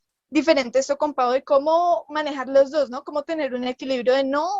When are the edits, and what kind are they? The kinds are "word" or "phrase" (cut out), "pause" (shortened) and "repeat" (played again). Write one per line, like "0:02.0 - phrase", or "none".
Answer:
none